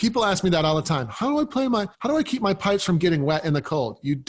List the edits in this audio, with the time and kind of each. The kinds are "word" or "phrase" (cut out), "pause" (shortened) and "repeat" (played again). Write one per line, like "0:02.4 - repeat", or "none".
0:01.9 - pause